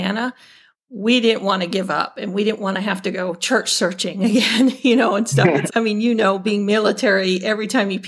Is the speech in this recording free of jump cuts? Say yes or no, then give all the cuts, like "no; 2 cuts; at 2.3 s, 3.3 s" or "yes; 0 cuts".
no; 1 cut; at 5.7 s